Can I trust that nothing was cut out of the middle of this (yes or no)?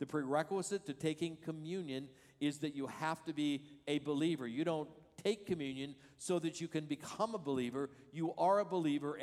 yes